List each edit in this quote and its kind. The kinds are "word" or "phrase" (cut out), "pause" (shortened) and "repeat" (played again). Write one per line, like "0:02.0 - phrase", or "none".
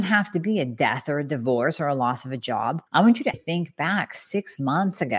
0:02.9 - pause
0:03.3 - word